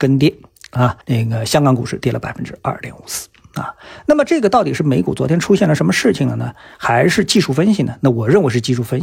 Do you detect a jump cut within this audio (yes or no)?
yes